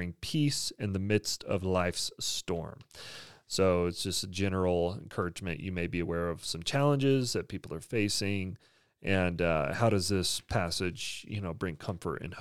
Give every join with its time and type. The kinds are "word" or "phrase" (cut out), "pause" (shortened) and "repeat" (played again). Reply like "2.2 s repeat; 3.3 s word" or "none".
none